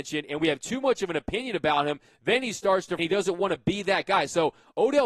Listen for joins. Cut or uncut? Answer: cut